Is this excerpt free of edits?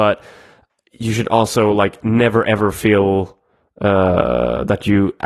yes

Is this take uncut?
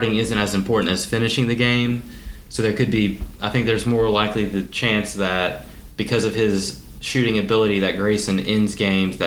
yes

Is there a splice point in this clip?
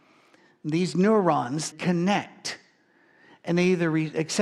yes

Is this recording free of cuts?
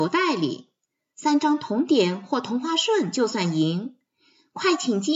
yes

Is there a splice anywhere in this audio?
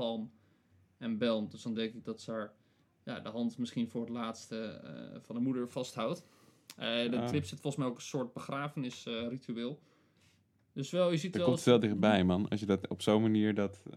yes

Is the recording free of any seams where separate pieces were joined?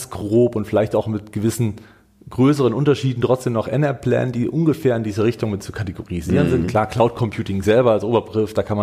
yes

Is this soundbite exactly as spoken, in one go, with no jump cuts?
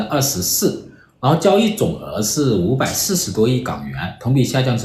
yes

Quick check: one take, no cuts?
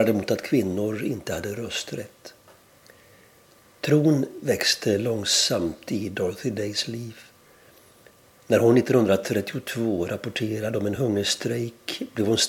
yes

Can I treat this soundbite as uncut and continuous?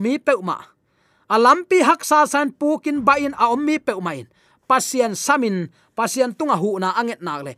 yes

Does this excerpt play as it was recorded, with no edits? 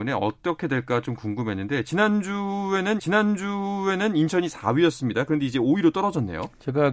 no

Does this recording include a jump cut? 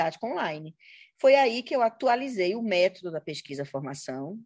no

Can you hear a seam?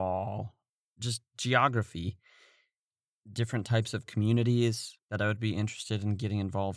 no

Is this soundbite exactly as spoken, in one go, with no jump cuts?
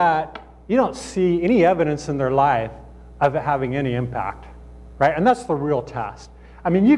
yes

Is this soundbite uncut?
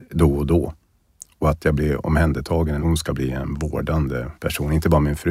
no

